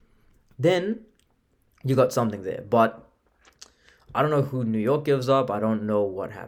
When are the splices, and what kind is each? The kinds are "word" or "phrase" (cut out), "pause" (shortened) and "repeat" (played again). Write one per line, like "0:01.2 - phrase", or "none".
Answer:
none

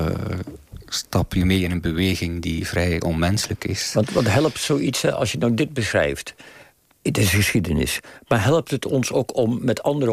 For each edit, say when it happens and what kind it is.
0:06.8 - pause

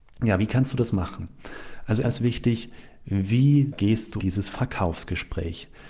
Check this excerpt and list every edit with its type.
0:02.0 - word
0:03.7 - word
0:04.2 - word

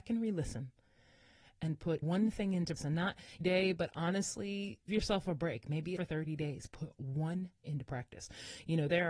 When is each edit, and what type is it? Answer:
0:02.0 - word
0:02.8 - word
0:03.4 - phrase
0:04.9 - word
0:06.0 - phrase
0:07.6 - word

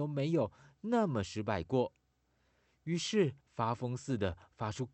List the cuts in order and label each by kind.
0:03.4 - pause

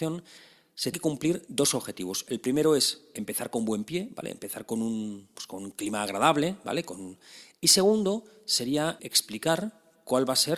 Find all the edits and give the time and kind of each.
0:00.9 - word
0:05.3 - word
0:09.0 - word

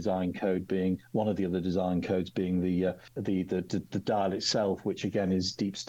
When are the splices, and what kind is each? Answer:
none

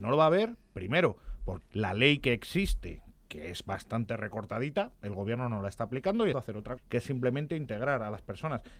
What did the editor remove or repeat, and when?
0:01.6 - word
0:06.3 - phrase
0:06.8 - word

